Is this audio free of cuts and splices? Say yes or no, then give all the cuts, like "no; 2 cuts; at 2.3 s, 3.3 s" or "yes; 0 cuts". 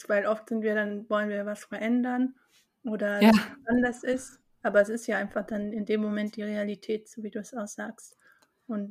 yes; 0 cuts